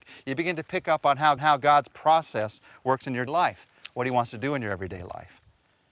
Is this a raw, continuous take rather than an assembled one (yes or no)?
no